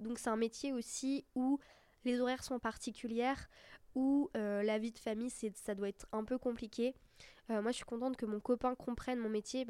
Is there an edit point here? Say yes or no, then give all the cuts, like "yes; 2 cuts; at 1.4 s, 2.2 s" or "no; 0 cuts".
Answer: no; 0 cuts